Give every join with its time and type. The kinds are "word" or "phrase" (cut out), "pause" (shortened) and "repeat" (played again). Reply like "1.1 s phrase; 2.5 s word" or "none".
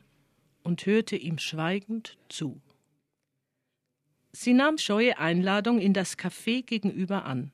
4.8 s word

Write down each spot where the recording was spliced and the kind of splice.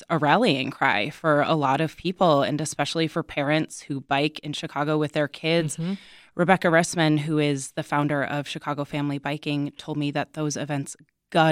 none

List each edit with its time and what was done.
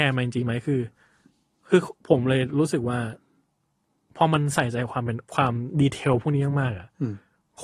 5.3 s pause

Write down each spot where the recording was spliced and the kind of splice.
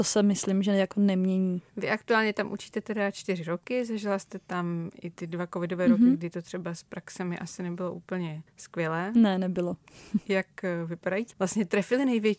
11.3 s phrase

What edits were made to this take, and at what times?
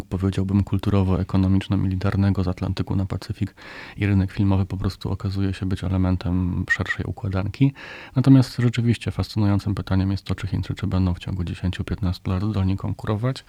none

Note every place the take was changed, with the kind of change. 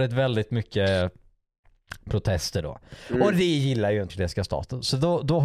4.1 s word

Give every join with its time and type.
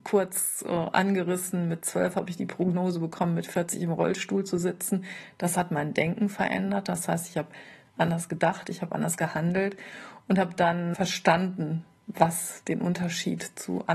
none

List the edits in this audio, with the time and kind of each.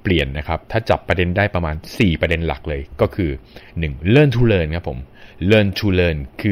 none

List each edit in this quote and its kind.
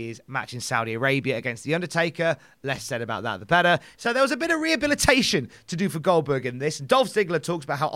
none

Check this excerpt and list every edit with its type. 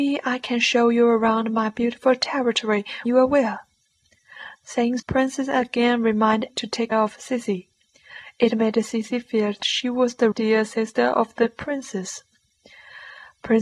3.1 s word; 5.0 s word; 6.5 s word; 6.9 s word; 9.6 s word; 10.3 s word

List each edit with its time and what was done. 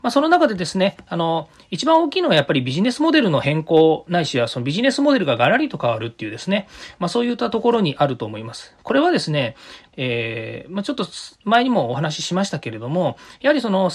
9.9 s phrase

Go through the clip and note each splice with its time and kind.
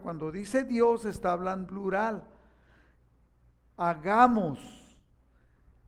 1.7 s word

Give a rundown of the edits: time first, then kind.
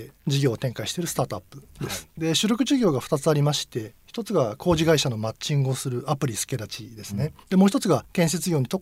7.4 s pause

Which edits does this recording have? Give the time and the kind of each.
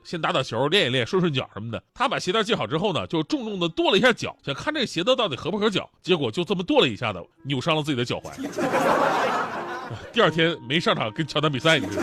1.9 s pause; 4.4 s pause; 6.0 s pause; 7.3 s pause

